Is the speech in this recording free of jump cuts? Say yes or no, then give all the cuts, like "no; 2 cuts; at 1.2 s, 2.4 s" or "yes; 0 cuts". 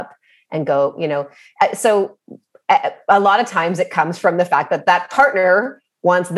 yes; 0 cuts